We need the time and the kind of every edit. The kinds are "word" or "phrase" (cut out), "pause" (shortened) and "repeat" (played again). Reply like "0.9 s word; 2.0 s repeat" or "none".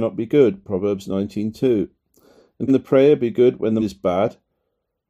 2.7 s word; 3.8 s word